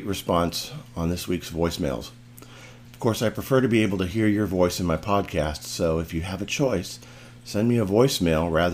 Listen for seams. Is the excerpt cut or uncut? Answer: uncut